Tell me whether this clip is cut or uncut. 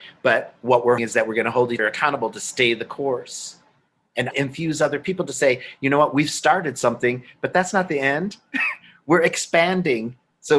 cut